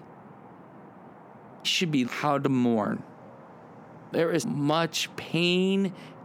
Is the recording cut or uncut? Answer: cut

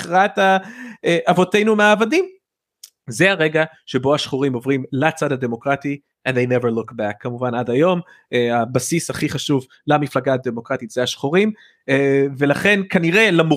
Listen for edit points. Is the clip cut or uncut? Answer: uncut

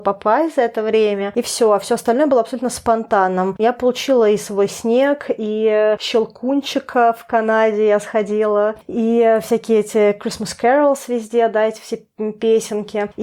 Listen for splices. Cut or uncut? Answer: uncut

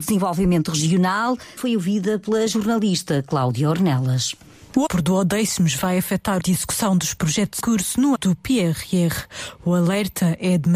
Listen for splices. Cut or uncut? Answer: cut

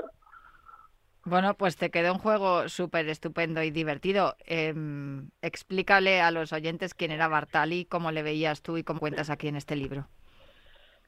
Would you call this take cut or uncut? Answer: cut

